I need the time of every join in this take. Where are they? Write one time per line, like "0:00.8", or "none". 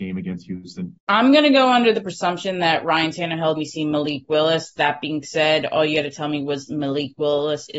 0:01.0
0:03.6